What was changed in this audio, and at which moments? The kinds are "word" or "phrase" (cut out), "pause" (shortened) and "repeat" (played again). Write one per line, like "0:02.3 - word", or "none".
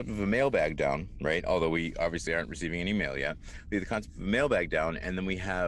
none